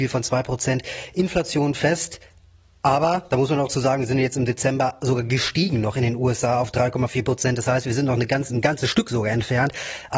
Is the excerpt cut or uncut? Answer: uncut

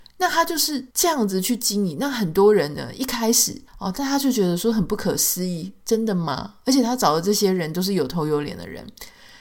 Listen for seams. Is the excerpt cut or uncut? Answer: cut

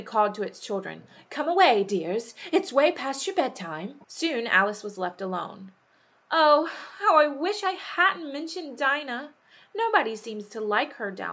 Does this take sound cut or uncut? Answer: cut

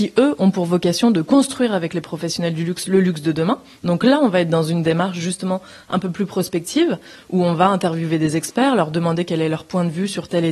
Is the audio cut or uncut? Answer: uncut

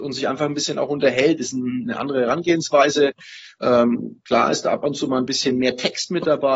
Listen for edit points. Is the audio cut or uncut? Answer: uncut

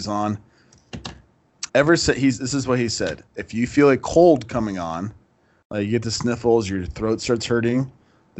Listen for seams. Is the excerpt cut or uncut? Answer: cut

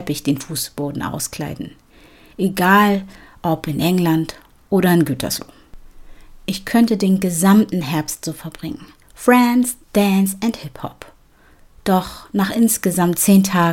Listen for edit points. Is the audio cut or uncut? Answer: uncut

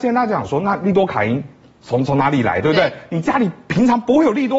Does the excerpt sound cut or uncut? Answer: uncut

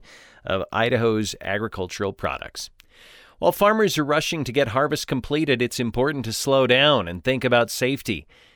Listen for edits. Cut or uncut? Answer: uncut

